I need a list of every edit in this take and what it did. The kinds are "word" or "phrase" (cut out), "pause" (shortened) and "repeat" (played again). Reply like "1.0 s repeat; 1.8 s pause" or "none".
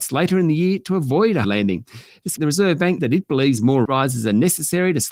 1.4 s word; 2.4 s word; 3.0 s word; 3.9 s word